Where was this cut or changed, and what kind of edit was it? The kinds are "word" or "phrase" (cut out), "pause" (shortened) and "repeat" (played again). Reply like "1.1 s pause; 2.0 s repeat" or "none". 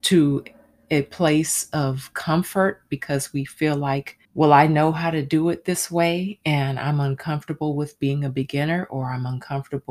4.2 s pause